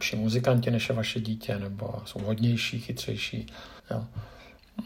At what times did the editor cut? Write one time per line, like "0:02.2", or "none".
0:03.8